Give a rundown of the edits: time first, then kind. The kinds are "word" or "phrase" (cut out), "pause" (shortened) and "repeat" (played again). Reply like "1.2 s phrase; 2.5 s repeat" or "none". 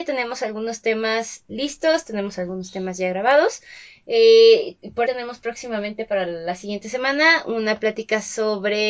1.5 s word; 5.0 s word